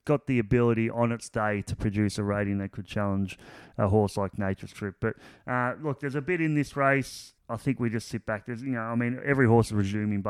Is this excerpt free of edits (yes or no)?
yes